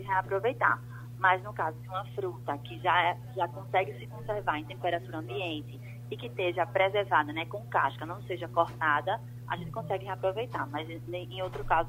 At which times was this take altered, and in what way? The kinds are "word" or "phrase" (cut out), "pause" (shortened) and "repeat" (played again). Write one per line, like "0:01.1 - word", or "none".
none